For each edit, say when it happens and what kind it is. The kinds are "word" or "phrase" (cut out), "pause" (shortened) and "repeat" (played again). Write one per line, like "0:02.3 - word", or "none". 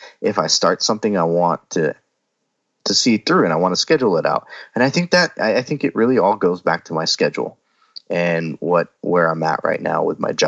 none